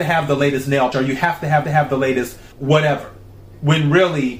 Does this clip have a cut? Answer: yes; 3 cuts; at 0.9 s, 1.6 s, 2.5 s

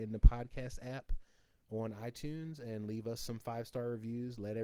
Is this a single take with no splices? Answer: yes; 0 cuts

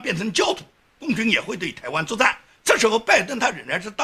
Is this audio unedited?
yes; 0 cuts

